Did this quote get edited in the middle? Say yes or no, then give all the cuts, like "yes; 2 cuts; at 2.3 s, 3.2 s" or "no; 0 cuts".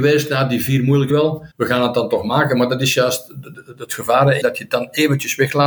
yes; 4 cuts; at 1.1 s, 1.5 s, 3.5 s, 4.4 s